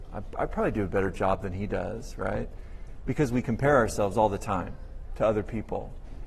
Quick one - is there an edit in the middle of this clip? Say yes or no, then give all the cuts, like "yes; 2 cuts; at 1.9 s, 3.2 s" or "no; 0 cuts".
no; 0 cuts